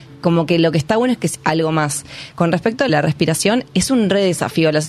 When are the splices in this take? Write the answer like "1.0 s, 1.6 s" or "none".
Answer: 1.3 s, 2.9 s